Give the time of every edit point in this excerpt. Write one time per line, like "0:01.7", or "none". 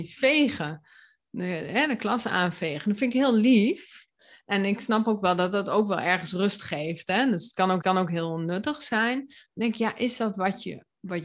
0:07.8